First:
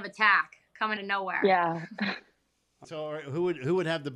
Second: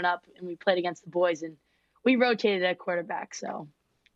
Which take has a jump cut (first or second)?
first